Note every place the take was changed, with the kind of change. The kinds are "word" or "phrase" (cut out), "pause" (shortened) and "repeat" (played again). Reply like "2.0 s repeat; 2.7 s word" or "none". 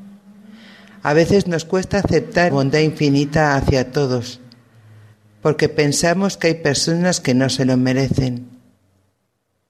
2.5 s word